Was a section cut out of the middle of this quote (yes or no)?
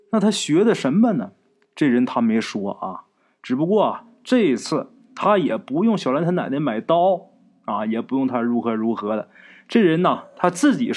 no